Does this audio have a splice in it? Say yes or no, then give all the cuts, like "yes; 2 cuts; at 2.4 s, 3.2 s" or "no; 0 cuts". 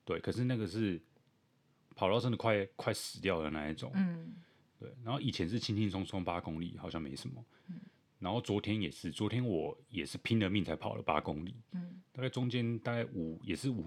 yes; 1 cut; at 8.1 s